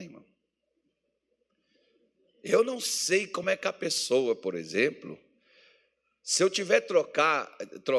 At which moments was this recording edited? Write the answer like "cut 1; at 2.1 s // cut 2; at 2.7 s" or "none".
none